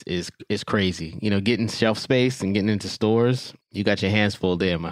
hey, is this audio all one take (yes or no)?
no